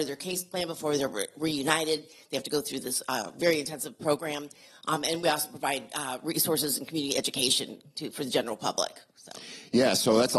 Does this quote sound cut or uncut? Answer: uncut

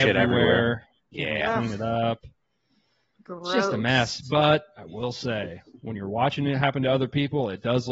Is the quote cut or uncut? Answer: uncut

